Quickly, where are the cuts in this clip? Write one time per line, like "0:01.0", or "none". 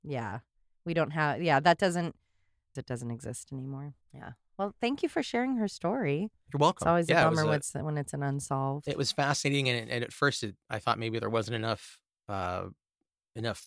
0:02.8
0:04.0

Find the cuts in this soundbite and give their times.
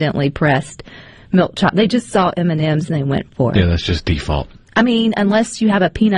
none

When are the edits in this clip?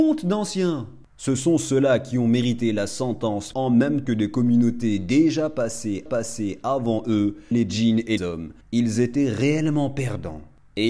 0:03.5
0:04.1
0:06.1
0:07.5
0:08.2
0:08.6

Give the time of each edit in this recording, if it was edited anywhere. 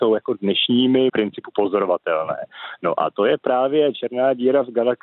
0:01.1

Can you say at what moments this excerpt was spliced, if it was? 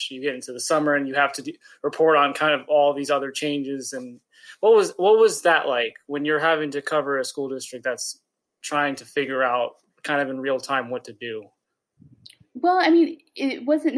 none

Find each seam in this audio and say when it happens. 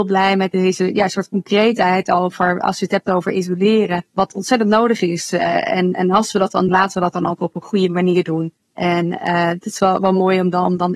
0:04.1
0:06.7
0:08.6

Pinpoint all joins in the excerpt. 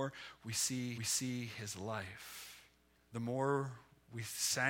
0:01.0
0:03.0

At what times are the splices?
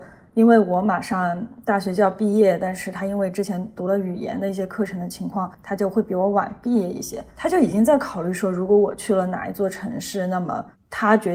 0:05.5
0:07.3

